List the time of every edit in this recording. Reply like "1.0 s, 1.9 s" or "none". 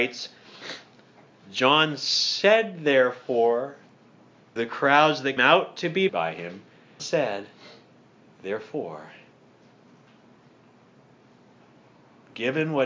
4.6 s, 5.4 s, 6.1 s, 7.0 s